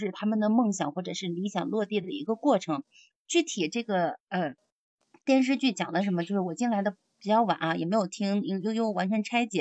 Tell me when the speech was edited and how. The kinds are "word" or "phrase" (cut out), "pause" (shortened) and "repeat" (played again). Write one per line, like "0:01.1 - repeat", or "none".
none